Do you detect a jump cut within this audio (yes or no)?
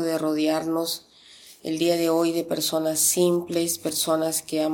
no